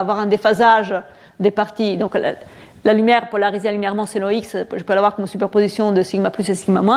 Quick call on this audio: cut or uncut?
uncut